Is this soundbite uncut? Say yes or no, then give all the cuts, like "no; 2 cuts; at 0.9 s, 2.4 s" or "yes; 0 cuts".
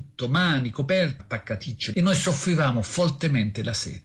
no; 2 cuts; at 1.2 s, 1.9 s